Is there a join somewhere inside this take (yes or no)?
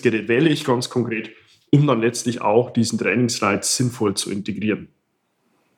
no